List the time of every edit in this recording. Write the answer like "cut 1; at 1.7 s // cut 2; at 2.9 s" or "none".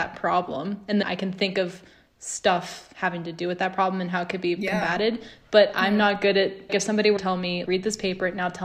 cut 1; at 1.0 s // cut 2; at 6.7 s // cut 3; at 7.2 s // cut 4; at 7.7 s